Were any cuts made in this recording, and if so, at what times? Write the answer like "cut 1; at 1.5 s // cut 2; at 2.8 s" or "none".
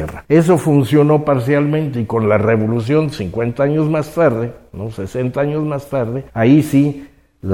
cut 1; at 6.3 s